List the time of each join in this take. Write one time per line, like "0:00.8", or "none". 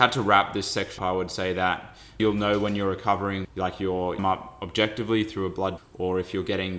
0:01.0
0:02.2
0:03.4
0:04.2
0:05.8